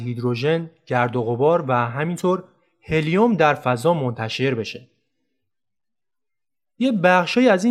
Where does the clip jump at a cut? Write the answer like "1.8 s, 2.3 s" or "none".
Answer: none